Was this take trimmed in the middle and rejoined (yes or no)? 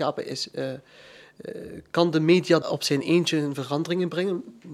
yes